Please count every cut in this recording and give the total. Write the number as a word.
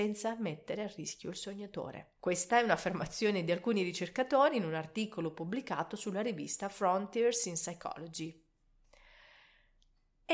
one